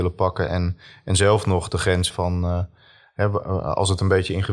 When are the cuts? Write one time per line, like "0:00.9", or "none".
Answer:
0:02.1